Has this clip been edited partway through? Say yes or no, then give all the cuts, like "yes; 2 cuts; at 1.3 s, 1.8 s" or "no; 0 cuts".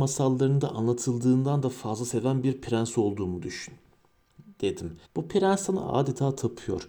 yes; 1 cut; at 5.0 s